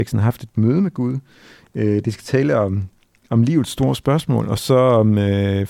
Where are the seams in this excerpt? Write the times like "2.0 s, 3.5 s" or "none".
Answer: none